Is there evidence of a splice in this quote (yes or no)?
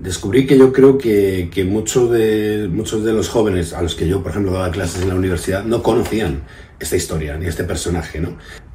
no